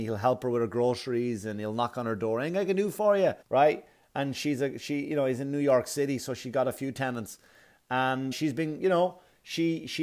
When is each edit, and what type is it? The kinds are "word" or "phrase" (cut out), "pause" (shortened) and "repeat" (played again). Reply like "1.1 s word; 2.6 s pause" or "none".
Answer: 3.4 s pause; 8.3 s word